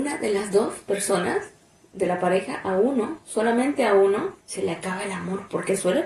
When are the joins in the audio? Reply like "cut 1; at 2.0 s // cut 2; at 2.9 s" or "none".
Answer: cut 1; at 4.4 s